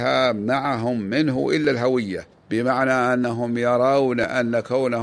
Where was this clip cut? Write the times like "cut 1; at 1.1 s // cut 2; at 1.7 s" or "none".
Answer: cut 1; at 2.3 s